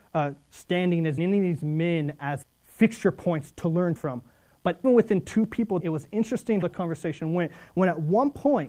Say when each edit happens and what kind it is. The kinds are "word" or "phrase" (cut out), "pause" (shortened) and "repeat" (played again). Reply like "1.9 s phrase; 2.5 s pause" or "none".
1.2 s word; 2.4 s word; 4.0 s word; 4.8 s word; 5.8 s word; 6.6 s word